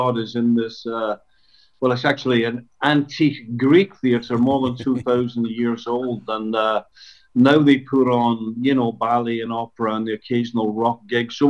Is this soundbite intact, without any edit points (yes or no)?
yes